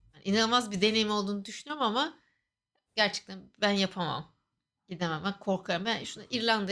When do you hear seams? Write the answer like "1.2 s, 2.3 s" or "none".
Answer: none